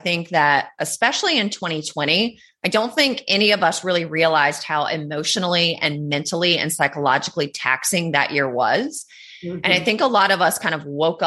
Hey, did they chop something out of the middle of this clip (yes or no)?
no